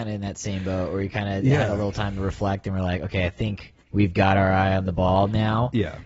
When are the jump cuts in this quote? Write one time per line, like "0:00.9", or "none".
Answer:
0:03.8